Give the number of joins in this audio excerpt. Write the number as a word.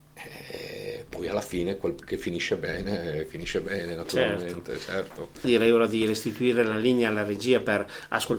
zero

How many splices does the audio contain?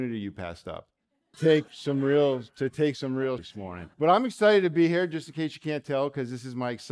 four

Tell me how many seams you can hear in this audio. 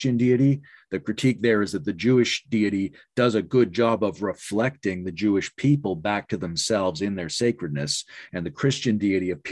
zero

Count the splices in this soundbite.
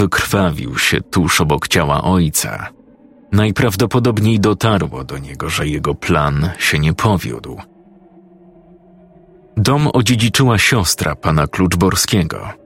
one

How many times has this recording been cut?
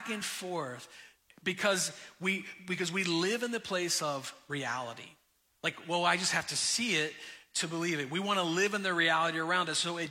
zero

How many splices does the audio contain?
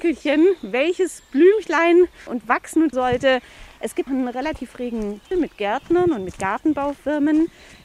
four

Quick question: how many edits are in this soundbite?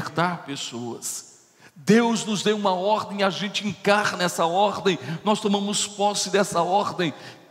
zero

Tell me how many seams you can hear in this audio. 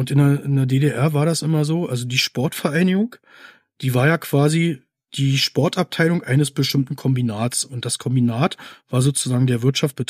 zero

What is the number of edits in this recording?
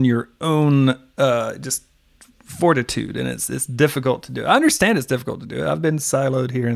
zero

